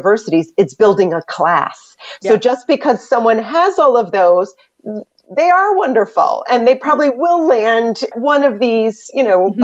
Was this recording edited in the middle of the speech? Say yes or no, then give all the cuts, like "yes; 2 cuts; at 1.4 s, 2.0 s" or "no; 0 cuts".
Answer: yes; 1 cut; at 8.1 s